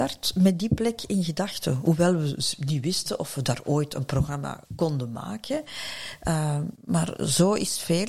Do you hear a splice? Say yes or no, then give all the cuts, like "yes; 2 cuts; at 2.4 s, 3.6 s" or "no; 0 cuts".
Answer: yes; 2 cuts; at 4.6 s, 6.7 s